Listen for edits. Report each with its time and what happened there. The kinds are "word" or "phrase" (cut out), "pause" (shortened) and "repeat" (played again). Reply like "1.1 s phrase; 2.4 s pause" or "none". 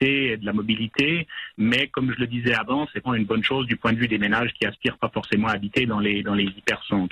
3.1 s phrase